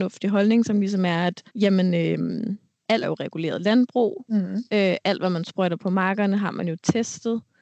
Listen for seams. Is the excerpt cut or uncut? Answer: cut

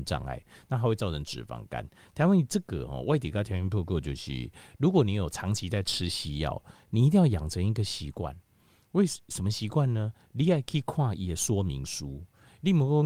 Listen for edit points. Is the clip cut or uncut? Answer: uncut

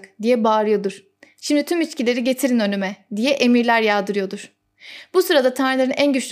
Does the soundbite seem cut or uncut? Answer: uncut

